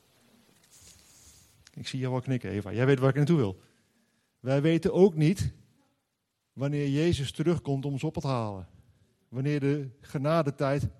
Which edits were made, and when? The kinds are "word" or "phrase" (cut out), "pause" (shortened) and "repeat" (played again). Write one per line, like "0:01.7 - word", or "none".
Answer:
none